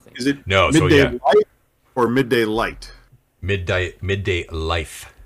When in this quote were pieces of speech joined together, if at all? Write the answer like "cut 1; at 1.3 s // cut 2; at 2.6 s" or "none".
none

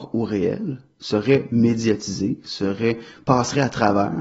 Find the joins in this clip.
none

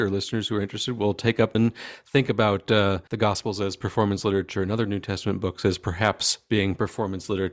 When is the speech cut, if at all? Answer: cut 1; at 1.5 s // cut 2; at 3.1 s

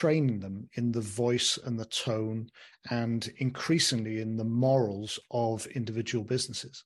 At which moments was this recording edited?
none

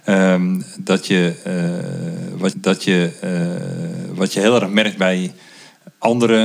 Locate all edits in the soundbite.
cut 1; at 2.5 s

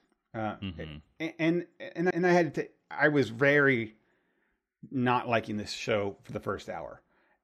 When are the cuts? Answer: cut 1; at 2.1 s

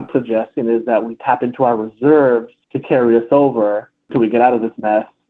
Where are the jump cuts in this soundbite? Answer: cut 1; at 2.6 s

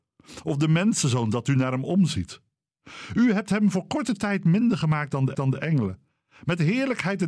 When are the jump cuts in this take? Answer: cut 1; at 5.3 s

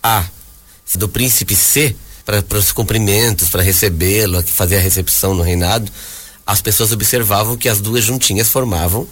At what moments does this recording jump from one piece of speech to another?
cut 1; at 0.9 s // cut 2; at 2.2 s

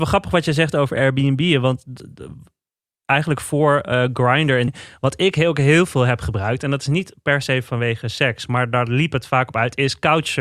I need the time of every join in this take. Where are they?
cut 1; at 4.7 s

